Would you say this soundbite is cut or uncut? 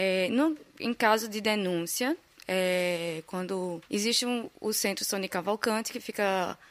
cut